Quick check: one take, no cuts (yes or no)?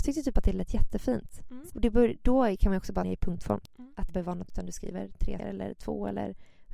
no